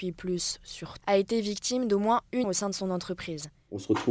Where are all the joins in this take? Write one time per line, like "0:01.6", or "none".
0:01.0
0:02.4